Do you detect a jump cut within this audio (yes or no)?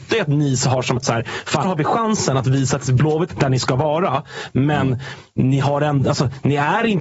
yes